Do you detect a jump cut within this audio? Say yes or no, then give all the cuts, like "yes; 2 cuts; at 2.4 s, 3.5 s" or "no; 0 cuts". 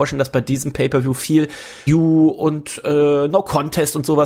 yes; 1 cut; at 1.9 s